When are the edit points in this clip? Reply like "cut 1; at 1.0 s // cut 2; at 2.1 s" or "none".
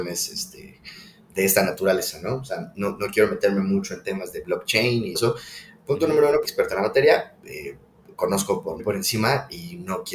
cut 1; at 5.1 s // cut 2; at 6.4 s // cut 3; at 7.4 s // cut 4; at 8.8 s